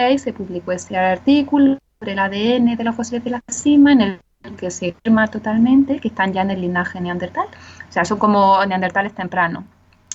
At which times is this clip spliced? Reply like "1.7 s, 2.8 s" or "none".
5.0 s